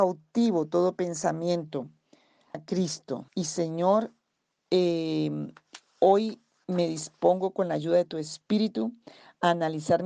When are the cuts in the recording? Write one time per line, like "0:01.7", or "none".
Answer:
0:02.5
0:03.3

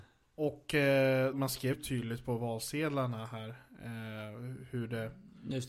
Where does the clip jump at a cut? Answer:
0:01.3
0:01.7

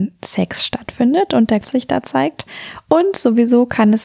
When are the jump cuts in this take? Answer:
0:01.6

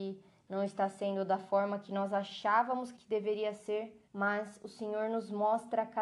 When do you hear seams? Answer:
0:03.0
0:04.1

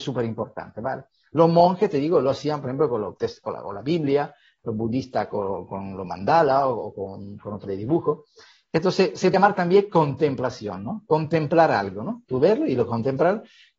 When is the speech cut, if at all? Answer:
0:03.2
0:07.7
0:09.3

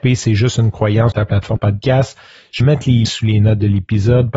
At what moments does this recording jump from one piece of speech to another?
0:01.1
0:01.6
0:02.6
0:03.1

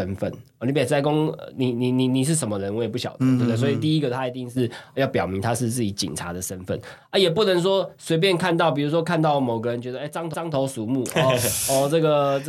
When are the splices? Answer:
0:10.3

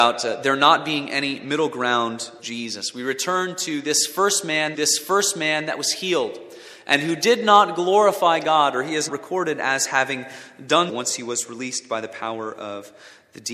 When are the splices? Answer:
0:02.4
0:04.7
0:09.1
0:10.9

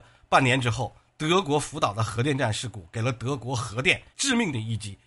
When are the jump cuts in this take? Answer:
0:04.1

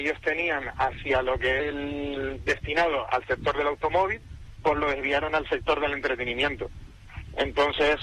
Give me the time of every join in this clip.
0:01.6

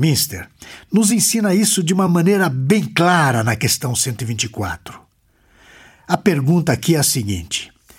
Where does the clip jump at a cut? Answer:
none

